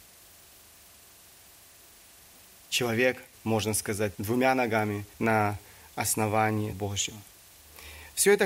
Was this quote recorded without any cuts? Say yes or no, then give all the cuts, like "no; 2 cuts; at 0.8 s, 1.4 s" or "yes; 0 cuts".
no; 4 cuts; at 3.3 s, 4.1 s, 5.1 s, 6.7 s